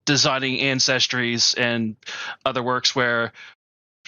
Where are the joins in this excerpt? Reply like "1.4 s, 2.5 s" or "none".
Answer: none